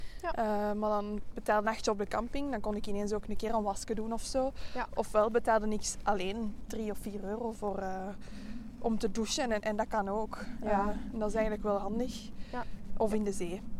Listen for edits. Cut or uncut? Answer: cut